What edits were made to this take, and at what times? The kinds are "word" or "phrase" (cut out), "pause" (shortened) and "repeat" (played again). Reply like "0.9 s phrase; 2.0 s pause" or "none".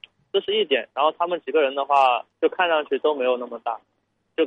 2.3 s pause